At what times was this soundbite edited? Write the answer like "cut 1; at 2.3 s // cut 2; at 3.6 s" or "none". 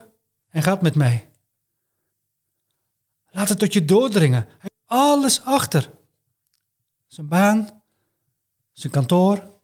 cut 1; at 0.9 s // cut 2; at 3.6 s // cut 3; at 4.7 s